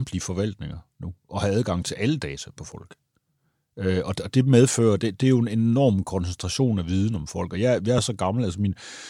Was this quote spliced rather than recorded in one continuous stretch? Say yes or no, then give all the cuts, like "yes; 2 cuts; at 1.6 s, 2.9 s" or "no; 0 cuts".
no; 0 cuts